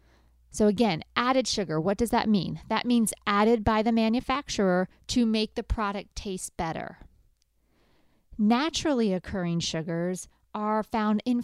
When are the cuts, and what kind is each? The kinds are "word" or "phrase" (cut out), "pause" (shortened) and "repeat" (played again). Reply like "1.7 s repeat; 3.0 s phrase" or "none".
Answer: none